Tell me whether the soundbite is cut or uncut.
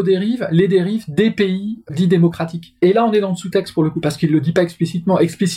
cut